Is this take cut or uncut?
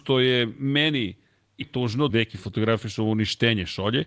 cut